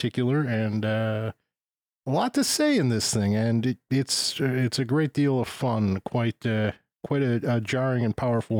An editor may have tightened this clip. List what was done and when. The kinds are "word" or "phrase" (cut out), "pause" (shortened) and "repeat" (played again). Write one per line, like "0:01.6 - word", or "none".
none